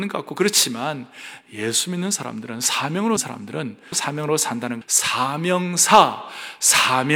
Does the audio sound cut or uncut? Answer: cut